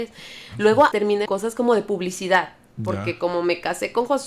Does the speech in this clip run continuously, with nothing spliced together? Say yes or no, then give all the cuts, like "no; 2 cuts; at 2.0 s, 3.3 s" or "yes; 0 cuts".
no; 2 cuts; at 0.9 s, 1.3 s